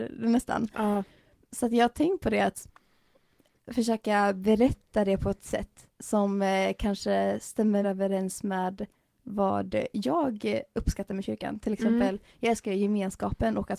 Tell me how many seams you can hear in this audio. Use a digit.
3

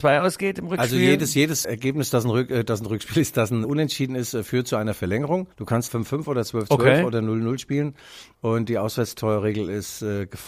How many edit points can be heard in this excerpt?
4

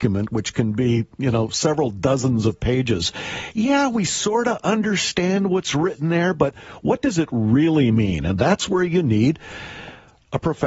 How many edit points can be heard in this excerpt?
0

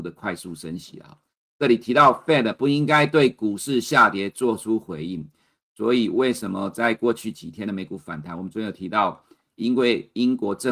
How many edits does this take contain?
0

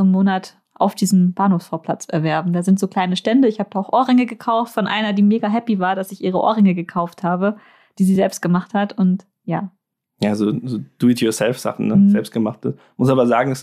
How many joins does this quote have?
0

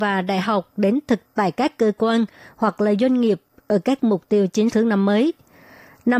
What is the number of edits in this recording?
3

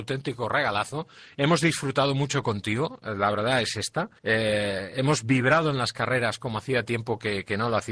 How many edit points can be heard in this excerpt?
1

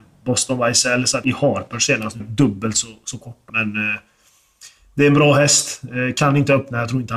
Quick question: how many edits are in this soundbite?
3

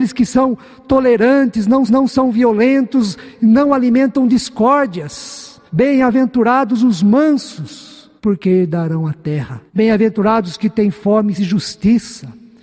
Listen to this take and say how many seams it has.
5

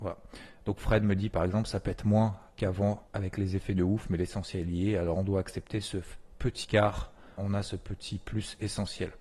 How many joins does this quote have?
3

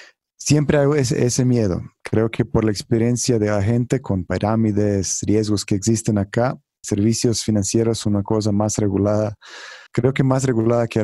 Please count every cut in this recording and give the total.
2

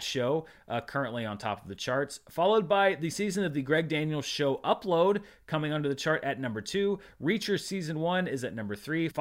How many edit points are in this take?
1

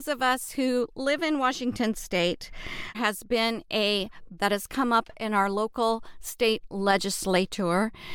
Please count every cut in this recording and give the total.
2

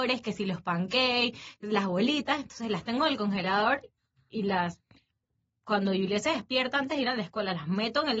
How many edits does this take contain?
0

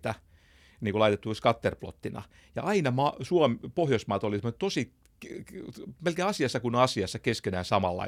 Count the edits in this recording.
0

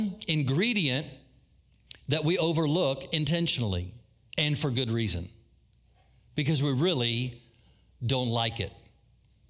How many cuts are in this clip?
0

